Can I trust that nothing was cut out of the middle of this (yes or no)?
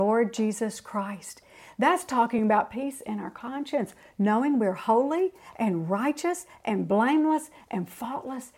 yes